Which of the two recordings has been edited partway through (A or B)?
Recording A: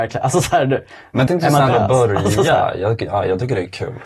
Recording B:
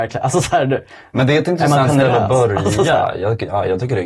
A